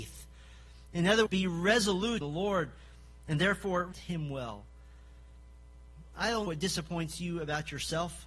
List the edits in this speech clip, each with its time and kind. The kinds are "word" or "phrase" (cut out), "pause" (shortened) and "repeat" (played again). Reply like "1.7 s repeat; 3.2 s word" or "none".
1.3 s word; 2.2 s phrase; 3.9 s word; 6.5 s word

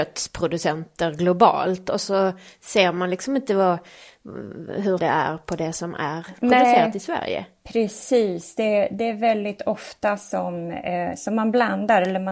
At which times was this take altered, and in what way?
5.0 s phrase

